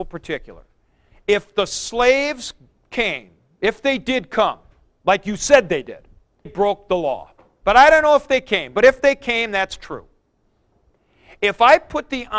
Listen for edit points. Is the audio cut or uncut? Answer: cut